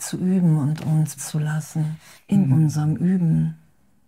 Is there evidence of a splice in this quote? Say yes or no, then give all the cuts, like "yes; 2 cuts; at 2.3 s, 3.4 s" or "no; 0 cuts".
yes; 2 cuts; at 1.2 s, 2.2 s